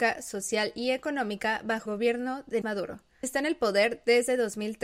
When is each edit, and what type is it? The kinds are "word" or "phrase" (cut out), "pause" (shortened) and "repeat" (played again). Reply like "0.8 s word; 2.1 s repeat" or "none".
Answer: 1.9 s word; 2.6 s word; 3.2 s word